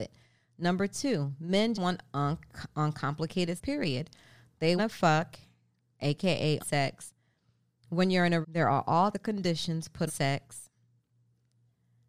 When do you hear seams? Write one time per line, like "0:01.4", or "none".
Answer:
0:01.7
0:03.6
0:04.8
0:06.6
0:08.4
0:09.1
0:10.1